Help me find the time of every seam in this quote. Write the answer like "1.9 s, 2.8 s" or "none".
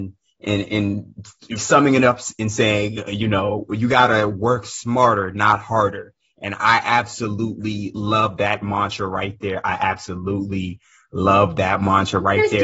1.6 s